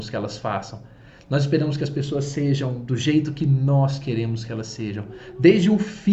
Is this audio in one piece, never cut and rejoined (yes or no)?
yes